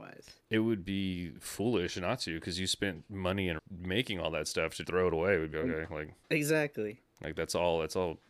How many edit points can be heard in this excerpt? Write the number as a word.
four